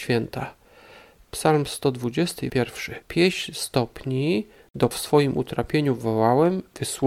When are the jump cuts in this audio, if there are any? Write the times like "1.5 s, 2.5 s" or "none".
2.5 s, 3.0 s, 4.9 s